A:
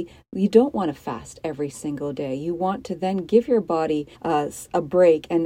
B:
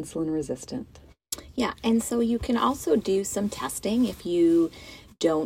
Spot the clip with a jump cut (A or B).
A